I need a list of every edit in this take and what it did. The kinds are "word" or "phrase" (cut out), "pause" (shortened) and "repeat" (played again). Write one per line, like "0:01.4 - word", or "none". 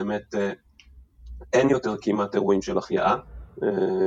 none